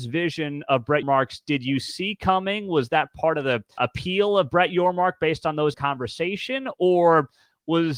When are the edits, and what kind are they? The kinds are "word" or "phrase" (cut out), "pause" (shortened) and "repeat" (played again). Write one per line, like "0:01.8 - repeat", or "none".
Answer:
0:01.0 - word
0:03.8 - word
0:05.7 - phrase